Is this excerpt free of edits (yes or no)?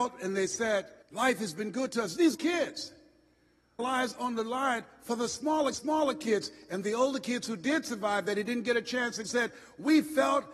no